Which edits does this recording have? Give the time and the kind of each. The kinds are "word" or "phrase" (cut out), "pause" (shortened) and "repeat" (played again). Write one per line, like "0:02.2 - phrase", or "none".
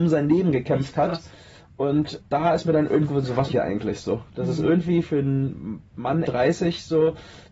0:02.2 - word
0:03.1 - word
0:03.5 - word
0:05.0 - word
0:06.2 - word